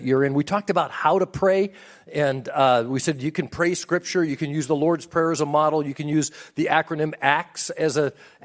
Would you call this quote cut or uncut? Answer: uncut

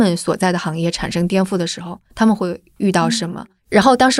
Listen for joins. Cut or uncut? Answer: cut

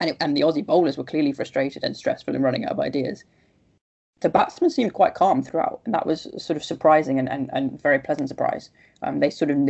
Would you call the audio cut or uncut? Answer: cut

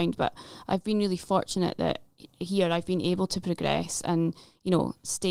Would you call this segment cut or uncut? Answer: uncut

